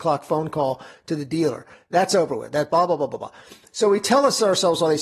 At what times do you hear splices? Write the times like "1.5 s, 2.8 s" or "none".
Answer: none